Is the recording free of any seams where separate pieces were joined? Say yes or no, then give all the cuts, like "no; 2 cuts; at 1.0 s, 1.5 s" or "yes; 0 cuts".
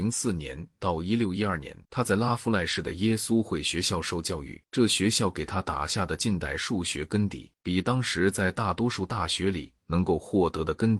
no; 3 cuts; at 1.8 s, 4.7 s, 7.6 s